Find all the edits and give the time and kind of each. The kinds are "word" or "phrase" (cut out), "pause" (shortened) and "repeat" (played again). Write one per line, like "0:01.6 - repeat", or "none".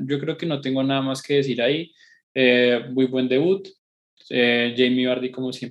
none